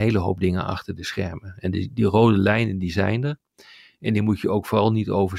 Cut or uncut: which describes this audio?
uncut